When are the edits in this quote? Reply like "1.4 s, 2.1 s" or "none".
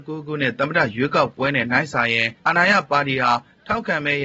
2.4 s